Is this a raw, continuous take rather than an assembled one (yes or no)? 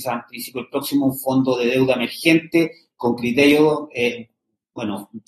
yes